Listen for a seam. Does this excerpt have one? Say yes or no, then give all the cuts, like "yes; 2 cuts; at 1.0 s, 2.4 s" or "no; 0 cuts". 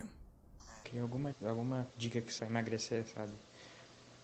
yes; 3 cuts; at 1.3 s, 1.9 s, 2.4 s